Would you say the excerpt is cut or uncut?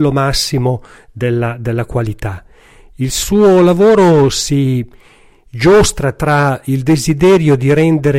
uncut